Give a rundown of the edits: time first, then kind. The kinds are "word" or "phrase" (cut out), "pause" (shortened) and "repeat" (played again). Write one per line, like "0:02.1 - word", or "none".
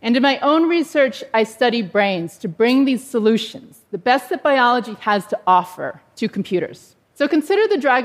0:07.0 - pause